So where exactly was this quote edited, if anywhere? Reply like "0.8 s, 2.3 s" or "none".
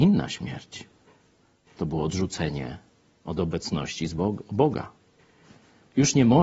none